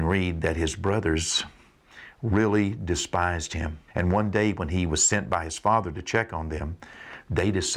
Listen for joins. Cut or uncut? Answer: cut